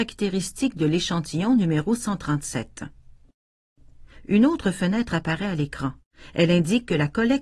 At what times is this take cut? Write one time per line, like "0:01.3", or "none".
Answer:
none